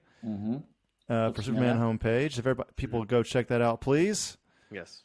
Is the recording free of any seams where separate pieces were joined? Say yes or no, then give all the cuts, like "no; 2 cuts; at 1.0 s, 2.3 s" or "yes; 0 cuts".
yes; 0 cuts